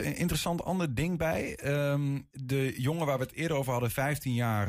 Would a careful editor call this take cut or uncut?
cut